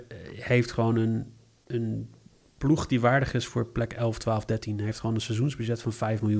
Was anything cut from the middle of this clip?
no; 0 cuts

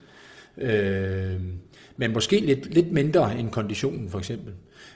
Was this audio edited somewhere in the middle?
no; 0 cuts

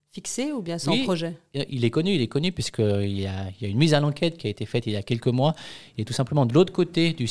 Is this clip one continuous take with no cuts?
yes; 0 cuts

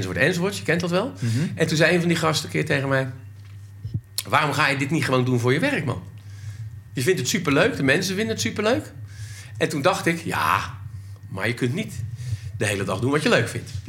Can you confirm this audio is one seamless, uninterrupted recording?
yes; 0 cuts

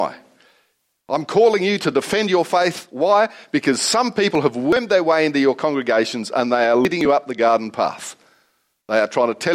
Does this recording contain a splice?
no; 0 cuts

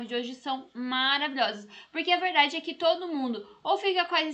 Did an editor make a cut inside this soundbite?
no; 0 cuts

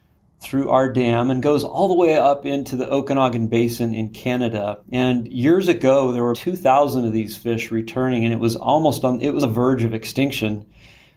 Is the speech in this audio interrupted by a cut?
yes; 3 cuts; at 4.8 s, 6.3 s, 9.4 s

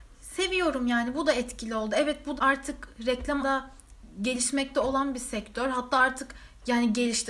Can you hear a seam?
yes; 2 cuts; at 2.4 s, 3.4 s

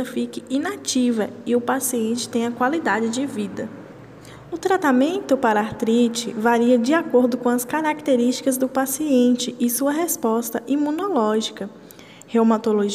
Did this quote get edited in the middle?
no; 0 cuts

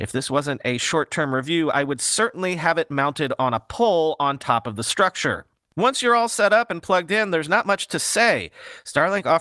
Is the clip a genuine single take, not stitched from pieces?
yes; 0 cuts

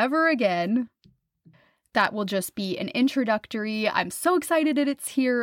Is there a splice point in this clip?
no; 0 cuts

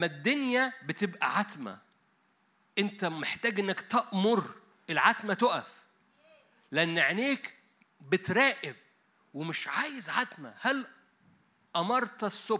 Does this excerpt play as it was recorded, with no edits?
yes; 0 cuts

